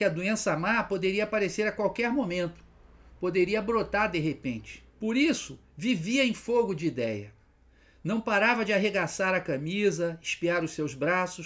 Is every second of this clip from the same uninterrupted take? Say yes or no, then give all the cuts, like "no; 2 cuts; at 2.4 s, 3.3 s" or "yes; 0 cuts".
no; 1 cut; at 4.9 s